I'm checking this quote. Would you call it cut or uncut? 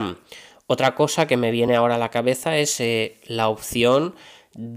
uncut